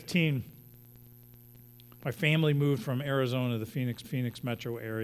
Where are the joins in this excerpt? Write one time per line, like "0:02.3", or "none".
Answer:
0:04.0